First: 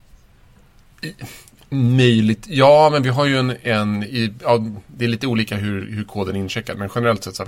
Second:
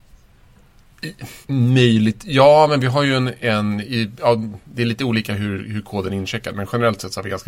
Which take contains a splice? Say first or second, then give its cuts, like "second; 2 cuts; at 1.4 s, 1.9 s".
second; 1 cut; at 1.4 s